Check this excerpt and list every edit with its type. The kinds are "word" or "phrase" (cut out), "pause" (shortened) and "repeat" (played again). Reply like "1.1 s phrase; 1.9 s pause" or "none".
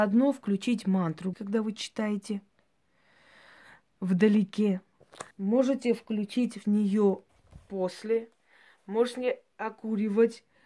1.3 s word; 5.3 s pause; 6.6 s word

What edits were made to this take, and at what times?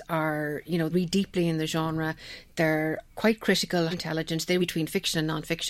0.9 s word; 3.1 s pause; 3.9 s word; 4.6 s phrase

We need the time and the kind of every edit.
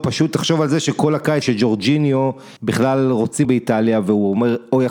1.4 s word; 2.6 s pause; 3.4 s word

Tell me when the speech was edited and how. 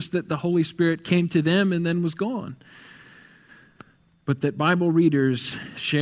none

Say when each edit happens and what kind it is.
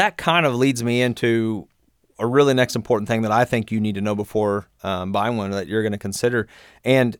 none

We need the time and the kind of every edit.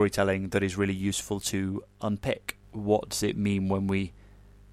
none

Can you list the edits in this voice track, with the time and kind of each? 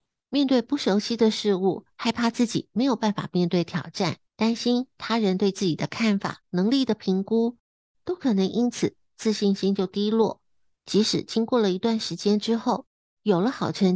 1.9 s pause; 4.3 s pause; 6.4 s pause

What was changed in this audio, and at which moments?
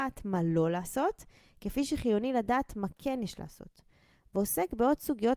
none

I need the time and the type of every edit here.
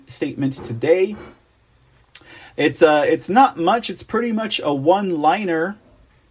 none

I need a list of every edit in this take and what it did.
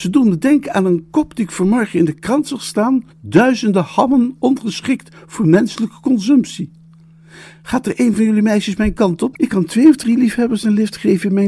3.1 s pause

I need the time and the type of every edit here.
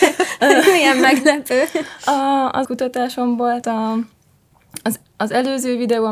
2.6 s word; 3.6 s word

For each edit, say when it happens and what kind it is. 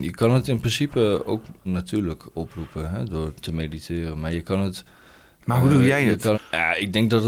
1.7 s word; 6.3 s word

